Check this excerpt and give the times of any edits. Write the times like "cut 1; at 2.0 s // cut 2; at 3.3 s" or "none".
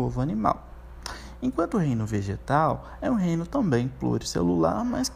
none